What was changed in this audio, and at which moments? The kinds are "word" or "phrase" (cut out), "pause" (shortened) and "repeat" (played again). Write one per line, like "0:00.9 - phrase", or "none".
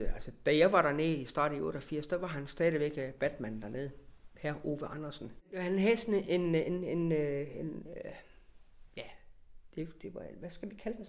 none